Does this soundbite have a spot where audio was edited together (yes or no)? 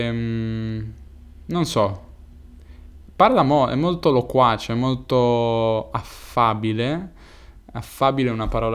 no